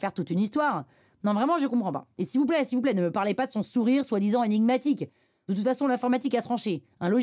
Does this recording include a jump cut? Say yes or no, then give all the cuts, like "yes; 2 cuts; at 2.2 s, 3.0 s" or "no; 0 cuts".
no; 0 cuts